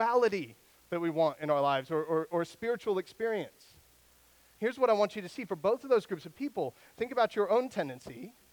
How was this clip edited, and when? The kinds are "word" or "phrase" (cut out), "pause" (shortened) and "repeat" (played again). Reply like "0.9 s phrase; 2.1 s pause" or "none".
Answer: none